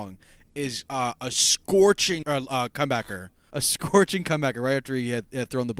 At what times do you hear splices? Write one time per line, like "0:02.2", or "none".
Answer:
0:02.2
0:03.5